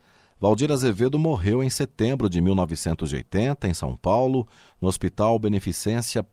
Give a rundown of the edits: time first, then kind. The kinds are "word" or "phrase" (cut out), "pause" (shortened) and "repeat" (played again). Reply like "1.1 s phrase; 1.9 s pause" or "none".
none